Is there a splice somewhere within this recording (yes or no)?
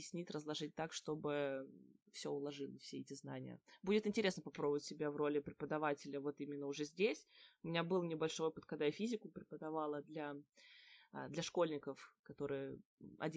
no